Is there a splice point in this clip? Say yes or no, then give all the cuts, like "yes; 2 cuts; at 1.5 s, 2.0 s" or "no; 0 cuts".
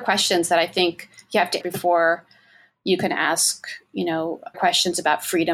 yes; 2 cuts; at 1.6 s, 4.5 s